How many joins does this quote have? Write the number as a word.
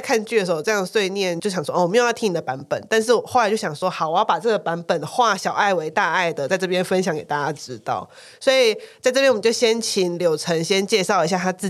zero